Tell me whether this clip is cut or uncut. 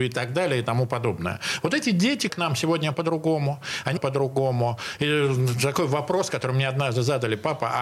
cut